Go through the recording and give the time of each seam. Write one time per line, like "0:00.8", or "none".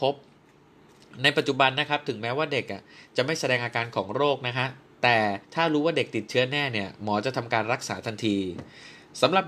0:05.4